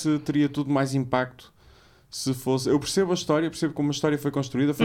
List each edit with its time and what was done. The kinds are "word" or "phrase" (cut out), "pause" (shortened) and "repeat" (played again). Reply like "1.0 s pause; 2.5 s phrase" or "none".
none